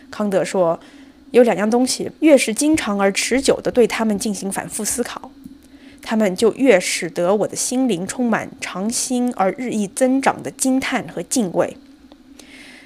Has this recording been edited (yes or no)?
yes